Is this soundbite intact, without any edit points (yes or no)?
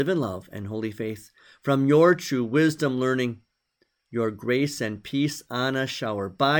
yes